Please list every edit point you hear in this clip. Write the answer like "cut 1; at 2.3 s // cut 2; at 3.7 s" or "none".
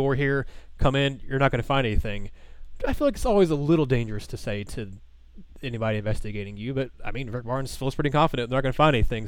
none

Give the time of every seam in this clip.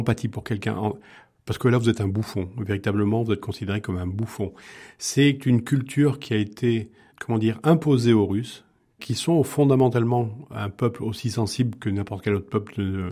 none

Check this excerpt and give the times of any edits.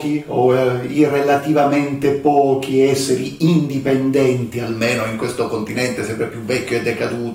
none

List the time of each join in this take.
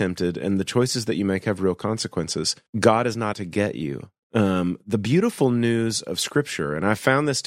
cut 1; at 2.7 s // cut 2; at 3.3 s

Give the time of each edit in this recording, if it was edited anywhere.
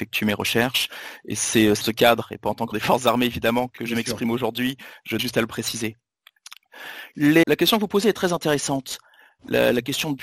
cut 1; at 1.8 s // cut 2; at 2.7 s // cut 3; at 3.8 s // cut 4; at 5.2 s // cut 5; at 7.4 s

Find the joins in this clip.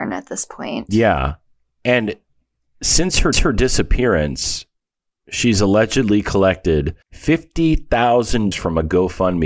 cut 1; at 3.3 s // cut 2; at 7.0 s // cut 3; at 8.5 s

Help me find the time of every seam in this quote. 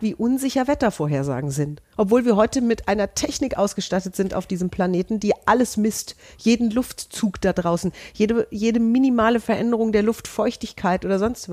cut 1; at 1.8 s

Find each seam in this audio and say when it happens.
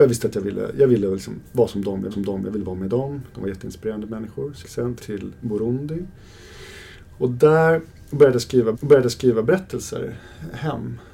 cut 1; at 2.1 s // cut 2; at 4.6 s // cut 3; at 5.0 s // cut 4; at 8.7 s

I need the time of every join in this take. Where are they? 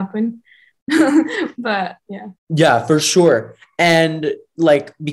none

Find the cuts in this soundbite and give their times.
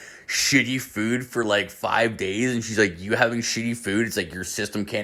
none

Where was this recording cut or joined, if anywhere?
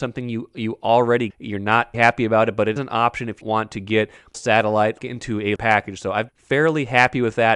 cut 1; at 1.3 s // cut 2; at 1.9 s // cut 3; at 2.8 s // cut 4; at 3.4 s // cut 5; at 4.3 s // cut 6; at 5.0 s // cut 7; at 5.6 s // cut 8; at 6.3 s

